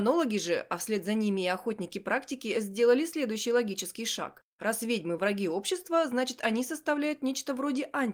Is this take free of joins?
yes; 0 cuts

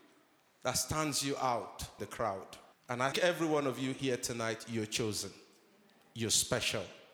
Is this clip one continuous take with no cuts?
no; 3 cuts; at 2.0 s, 2.7 s, 3.1 s

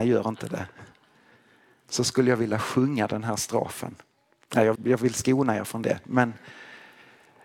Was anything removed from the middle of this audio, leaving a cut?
yes; 1 cut; at 4.7 s

